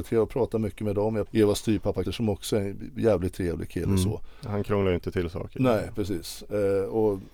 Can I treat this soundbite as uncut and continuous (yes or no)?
no